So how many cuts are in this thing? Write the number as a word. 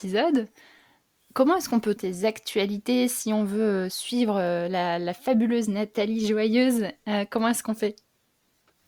one